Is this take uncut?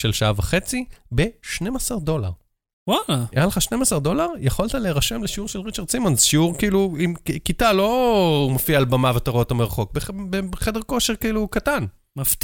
yes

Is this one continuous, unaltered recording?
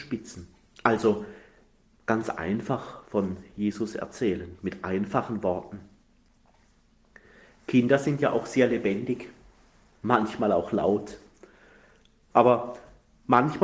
yes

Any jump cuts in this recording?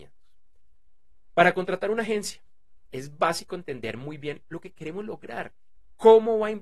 no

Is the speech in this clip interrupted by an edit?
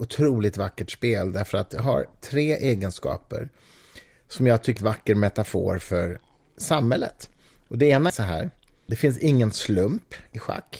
yes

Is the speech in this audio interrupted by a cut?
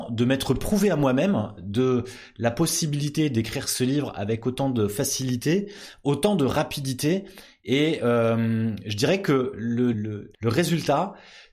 yes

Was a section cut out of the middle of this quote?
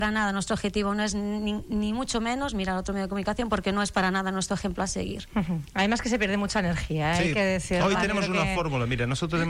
no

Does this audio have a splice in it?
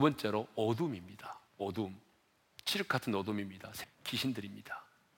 yes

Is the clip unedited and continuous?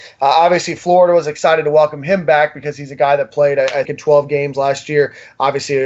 no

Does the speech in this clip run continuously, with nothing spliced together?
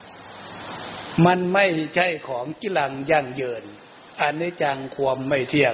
yes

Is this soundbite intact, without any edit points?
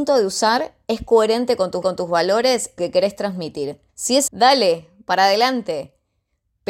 no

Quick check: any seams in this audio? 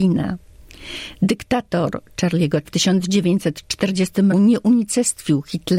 yes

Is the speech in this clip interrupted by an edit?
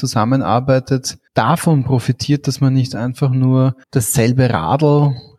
yes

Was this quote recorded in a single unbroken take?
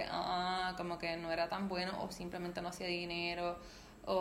yes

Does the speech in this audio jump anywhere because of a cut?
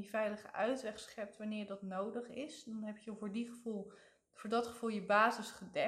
no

